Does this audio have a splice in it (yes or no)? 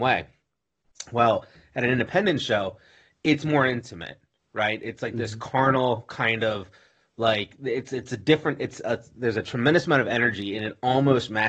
no